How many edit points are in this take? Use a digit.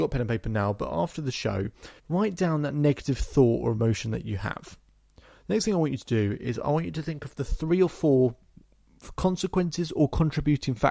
1